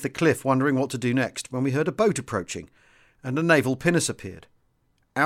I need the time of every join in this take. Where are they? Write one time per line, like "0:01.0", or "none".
none